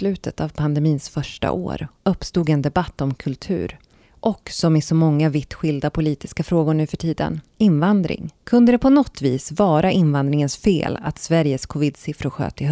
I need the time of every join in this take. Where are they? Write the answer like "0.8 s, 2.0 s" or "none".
8.4 s